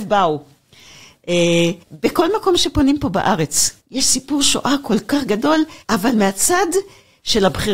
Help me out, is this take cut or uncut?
cut